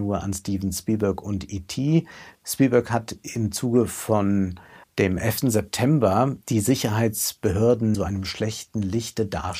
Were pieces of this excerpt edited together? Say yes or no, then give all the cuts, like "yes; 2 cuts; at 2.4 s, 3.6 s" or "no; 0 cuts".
yes; 2 cuts; at 4.8 s, 7.9 s